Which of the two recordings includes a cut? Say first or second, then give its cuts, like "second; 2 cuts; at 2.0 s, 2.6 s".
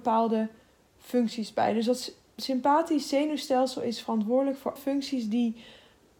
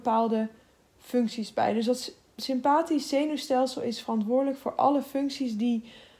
first; 1 cut; at 4.8 s